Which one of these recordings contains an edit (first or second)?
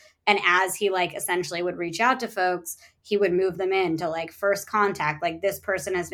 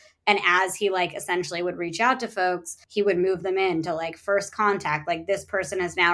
second